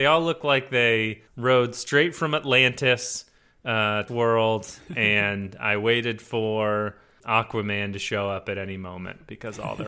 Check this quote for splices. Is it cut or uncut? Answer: cut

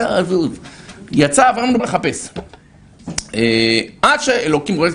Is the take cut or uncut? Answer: cut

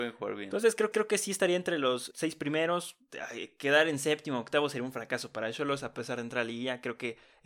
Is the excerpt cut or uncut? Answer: cut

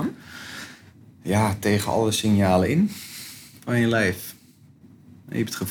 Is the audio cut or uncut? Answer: uncut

